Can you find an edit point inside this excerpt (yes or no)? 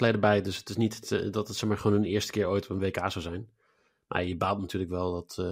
no